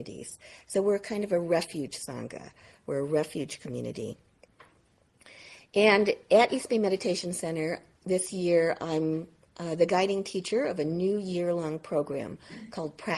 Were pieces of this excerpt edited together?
no; 0 cuts

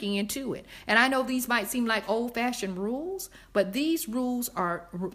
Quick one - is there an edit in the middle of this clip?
no; 0 cuts

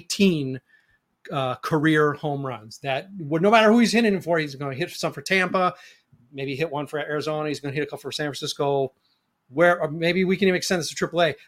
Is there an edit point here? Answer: no; 0 cuts

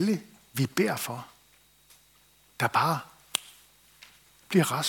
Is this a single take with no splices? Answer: yes; 0 cuts

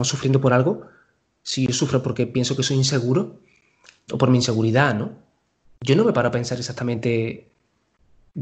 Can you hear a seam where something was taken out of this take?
yes; 1 cut; at 4.1 s

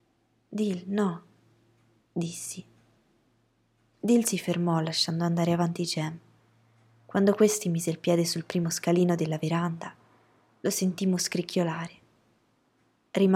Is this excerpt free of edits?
yes; 0 cuts

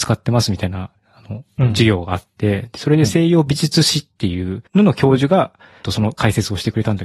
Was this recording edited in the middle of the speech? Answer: yes; 3 cuts; at 1.0 s, 4.7 s, 5.8 s

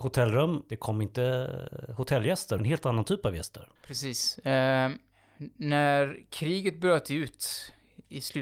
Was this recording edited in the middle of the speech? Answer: yes; 2 cuts; at 2.6 s, 3.8 s

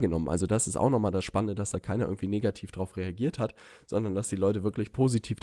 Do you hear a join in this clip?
no; 0 cuts

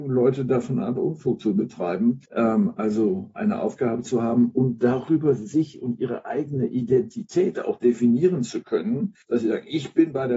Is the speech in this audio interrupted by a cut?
yes; 2 cuts; at 2.3 s, 9.2 s

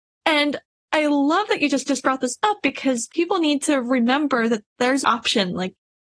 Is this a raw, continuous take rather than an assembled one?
no; 2 cuts; at 1.9 s, 5.0 s

